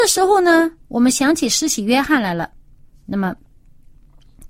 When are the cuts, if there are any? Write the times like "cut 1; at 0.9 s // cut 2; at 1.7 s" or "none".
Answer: none